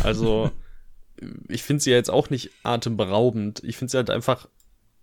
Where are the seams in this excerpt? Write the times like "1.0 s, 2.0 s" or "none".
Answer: none